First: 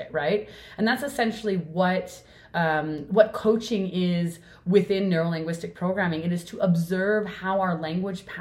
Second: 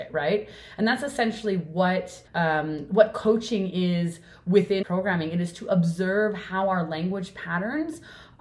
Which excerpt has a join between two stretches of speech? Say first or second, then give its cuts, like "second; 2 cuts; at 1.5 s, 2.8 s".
second; 2 cuts; at 2.3 s, 4.8 s